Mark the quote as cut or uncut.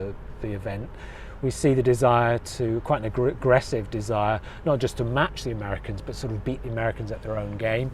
uncut